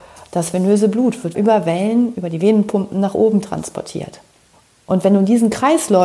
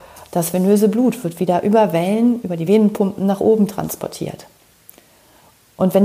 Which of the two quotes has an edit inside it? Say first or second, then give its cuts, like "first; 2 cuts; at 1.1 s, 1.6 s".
first; 2 cuts; at 1.3 s, 4.5 s